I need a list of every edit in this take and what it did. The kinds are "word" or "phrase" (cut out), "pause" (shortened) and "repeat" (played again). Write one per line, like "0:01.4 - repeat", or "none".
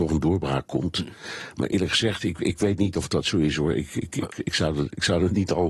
none